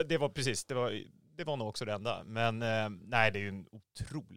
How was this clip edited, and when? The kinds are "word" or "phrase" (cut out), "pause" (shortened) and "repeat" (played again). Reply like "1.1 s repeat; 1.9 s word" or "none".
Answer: none